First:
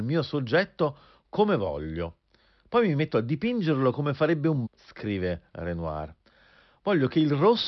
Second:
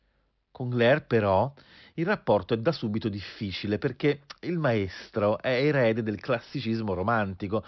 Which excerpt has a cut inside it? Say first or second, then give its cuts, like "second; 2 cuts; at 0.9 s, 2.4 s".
first; 1 cut; at 4.7 s